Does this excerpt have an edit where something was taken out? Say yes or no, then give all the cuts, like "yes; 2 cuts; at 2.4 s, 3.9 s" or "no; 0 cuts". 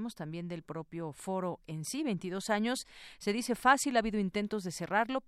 no; 0 cuts